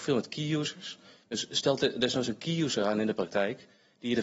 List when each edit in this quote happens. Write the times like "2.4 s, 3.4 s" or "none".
none